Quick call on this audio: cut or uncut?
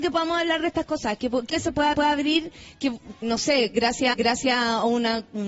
cut